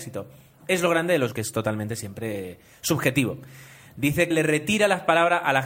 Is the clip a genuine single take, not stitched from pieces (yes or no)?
no